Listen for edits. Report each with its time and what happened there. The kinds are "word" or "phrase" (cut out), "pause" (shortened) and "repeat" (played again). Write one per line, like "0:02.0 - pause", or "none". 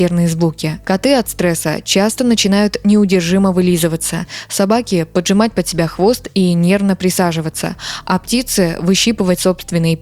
none